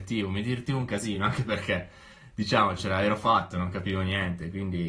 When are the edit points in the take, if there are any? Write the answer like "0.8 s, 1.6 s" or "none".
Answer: none